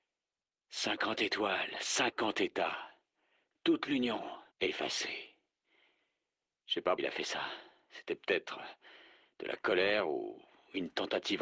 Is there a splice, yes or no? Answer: yes